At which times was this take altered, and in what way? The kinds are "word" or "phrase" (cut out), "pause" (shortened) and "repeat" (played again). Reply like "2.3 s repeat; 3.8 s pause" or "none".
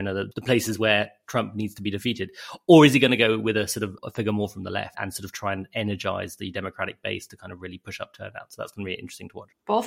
none